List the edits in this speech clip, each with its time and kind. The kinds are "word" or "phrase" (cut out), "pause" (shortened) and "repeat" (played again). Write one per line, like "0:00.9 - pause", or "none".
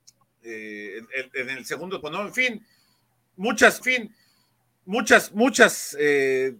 0:02.0 - word
0:03.8 - repeat